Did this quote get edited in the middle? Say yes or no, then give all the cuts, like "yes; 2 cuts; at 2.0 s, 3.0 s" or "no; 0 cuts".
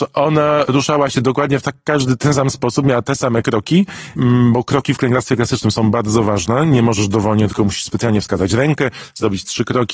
no; 0 cuts